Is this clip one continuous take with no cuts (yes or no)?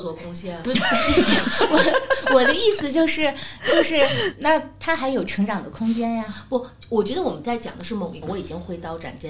no